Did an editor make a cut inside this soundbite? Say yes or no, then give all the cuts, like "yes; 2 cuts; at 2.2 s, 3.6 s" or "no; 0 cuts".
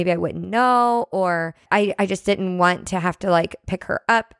yes; 1 cut; at 1.6 s